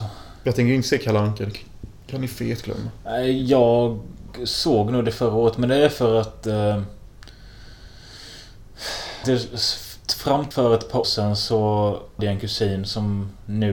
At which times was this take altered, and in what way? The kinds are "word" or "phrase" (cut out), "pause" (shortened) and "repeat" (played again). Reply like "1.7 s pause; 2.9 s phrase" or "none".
9.2 s word; 10.5 s word; 11.0 s word; 12.2 s word